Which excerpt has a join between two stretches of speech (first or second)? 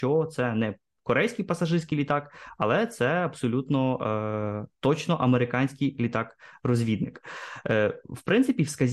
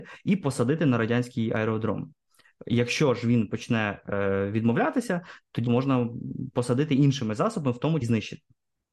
second